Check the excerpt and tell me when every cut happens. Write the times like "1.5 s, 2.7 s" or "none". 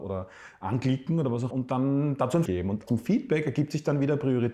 1.5 s, 2.5 s, 2.9 s

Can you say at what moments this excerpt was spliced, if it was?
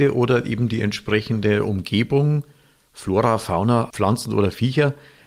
3.9 s

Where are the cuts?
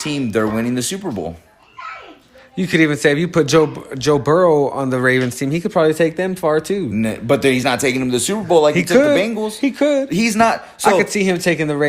none

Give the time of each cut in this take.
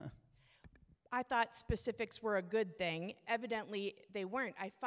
none

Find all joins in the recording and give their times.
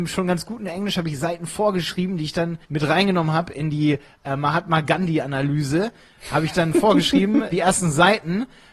2.6 s, 7.5 s

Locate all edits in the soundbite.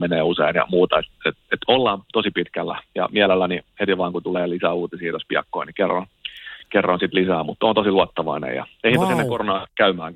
none

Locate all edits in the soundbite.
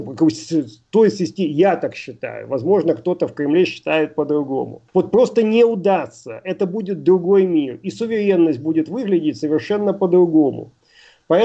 4.9 s

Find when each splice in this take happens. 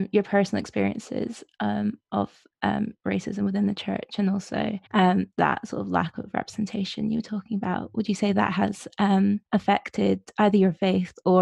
4.9 s, 9.5 s

